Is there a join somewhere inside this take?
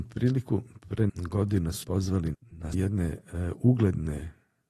yes; 4 cuts; at 1.1 s, 1.8 s, 2.3 s, 2.7 s

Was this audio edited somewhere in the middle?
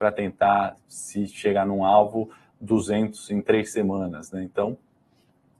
no; 0 cuts

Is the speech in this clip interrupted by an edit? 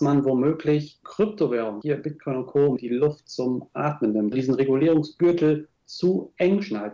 yes; 4 cuts; at 1.0 s, 1.8 s, 2.8 s, 4.3 s

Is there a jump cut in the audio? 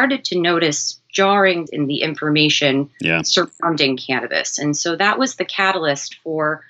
yes; 1 cut; at 1.7 s

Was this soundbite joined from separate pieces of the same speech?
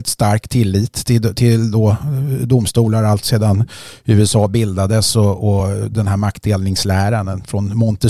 no; 0 cuts

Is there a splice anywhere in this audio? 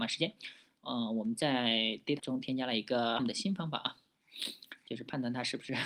yes; 2 cuts; at 2.2 s, 3.2 s

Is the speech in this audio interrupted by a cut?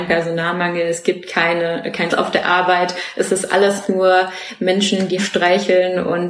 yes; 2 cuts; at 2.1 s, 5.2 s

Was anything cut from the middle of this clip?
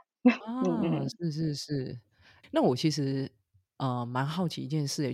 yes; 1 cut; at 2.4 s

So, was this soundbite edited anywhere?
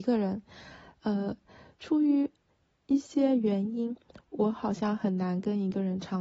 no; 0 cuts

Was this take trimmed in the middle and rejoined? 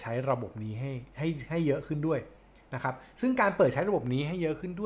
no; 0 cuts

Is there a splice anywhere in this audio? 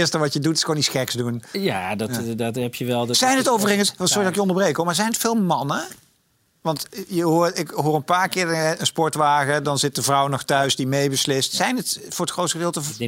no; 0 cuts

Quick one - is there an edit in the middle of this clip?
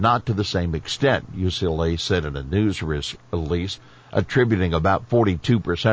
no; 0 cuts

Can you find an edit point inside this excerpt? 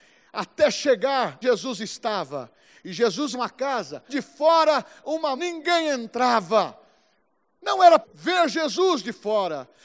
yes; 5 cuts; at 1.4 s, 3.3 s, 4.1 s, 5.4 s, 8.0 s

